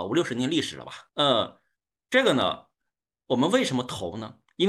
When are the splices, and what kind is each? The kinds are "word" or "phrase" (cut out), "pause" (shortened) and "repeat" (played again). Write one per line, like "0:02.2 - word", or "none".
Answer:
0:01.1 - pause